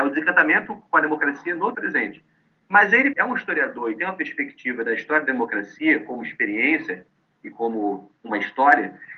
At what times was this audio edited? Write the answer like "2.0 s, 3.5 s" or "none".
1.7 s, 3.1 s, 8.1 s